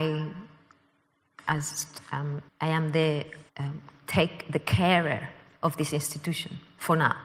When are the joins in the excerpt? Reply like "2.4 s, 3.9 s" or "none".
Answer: 2.5 s, 3.5 s